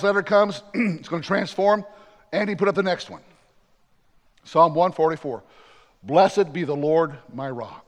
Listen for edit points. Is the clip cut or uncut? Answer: uncut